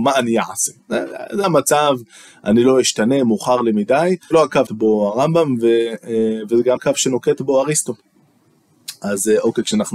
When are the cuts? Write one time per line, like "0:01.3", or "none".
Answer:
0:01.4
0:04.3
0:04.7
0:06.8